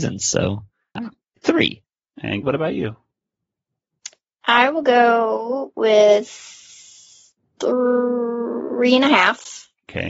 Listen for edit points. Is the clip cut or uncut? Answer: cut